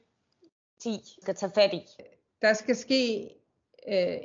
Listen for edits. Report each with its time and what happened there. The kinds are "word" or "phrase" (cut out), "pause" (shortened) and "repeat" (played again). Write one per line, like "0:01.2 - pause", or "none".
0:01.2 - phrase

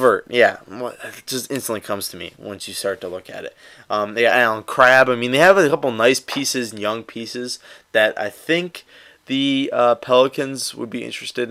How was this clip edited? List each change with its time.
none

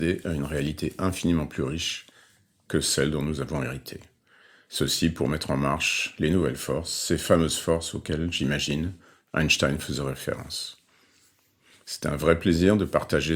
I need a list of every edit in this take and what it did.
none

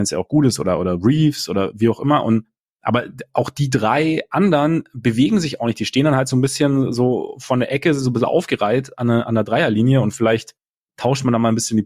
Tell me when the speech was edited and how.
none

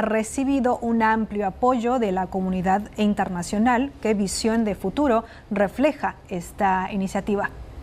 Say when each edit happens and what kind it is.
none

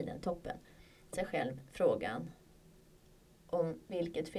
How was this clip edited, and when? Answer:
0:01.1 - word

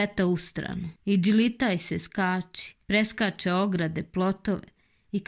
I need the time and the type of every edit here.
0:01.0 - pause
0:02.8 - pause

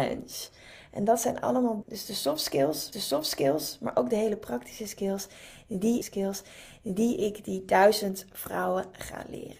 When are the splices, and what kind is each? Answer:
0:01.8 - word
0:02.9 - repeat
0:06.0 - repeat

